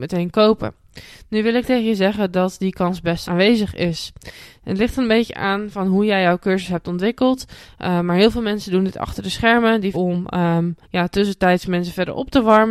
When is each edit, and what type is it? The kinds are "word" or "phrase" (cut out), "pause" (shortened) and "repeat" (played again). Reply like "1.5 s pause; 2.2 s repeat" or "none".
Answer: 3.3 s phrase; 9.9 s word; 10.8 s pause

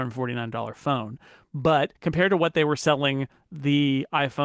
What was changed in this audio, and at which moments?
2.0 s pause

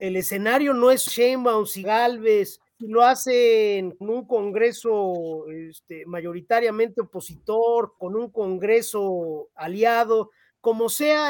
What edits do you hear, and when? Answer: 1.1 s phrase; 1.8 s word; 2.7 s pause; 4.0 s word; 8.0 s word

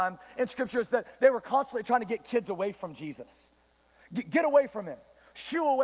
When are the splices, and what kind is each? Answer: none

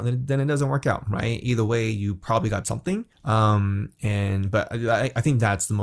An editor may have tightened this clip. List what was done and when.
2.6 s word; 3.1 s pause

